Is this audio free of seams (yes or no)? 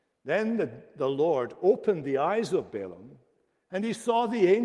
yes